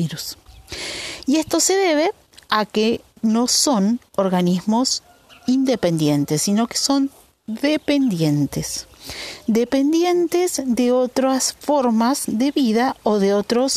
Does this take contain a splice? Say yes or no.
no